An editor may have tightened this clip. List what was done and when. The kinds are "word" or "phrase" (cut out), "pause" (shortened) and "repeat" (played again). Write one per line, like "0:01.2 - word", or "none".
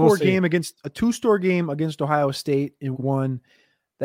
0:02.9 - word